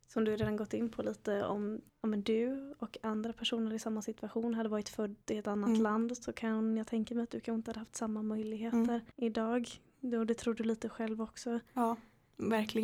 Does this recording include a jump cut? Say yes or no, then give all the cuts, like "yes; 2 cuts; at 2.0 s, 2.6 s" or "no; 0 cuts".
yes; 3 cuts; at 1.9 s, 5.2 s, 9.1 s